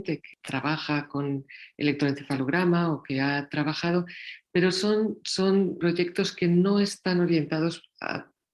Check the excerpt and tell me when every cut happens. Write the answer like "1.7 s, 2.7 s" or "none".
none